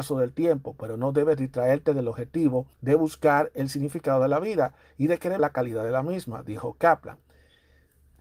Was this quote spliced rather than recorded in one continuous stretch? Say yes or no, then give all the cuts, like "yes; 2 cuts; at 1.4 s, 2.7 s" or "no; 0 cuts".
yes; 2 cuts; at 2.7 s, 5.4 s